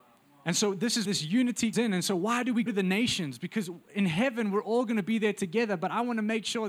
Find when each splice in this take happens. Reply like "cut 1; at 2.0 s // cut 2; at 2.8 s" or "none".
cut 1; at 1.0 s // cut 2; at 1.7 s // cut 3; at 2.7 s